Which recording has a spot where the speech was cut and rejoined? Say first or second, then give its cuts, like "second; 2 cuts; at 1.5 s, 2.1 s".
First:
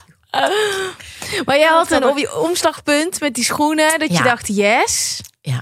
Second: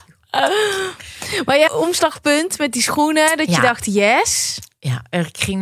second; 1 cut; at 1.7 s